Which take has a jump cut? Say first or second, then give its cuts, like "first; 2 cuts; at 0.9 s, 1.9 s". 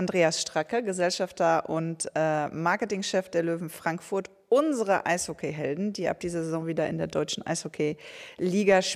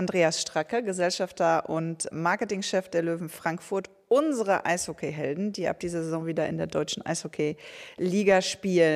second; 1 cut; at 2.1 s